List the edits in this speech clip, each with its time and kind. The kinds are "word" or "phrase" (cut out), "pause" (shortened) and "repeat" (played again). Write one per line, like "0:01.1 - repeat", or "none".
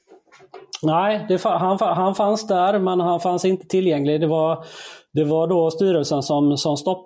0:01.8 - repeat